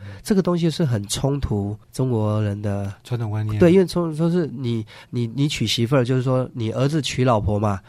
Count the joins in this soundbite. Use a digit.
1